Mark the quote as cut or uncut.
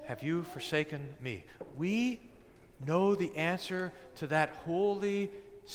uncut